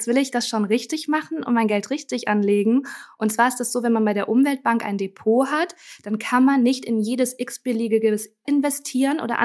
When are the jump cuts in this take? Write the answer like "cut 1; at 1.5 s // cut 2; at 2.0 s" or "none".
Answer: cut 1; at 8.4 s